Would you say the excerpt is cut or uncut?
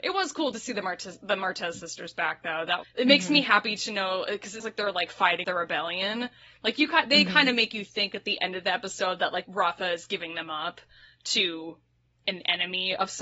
cut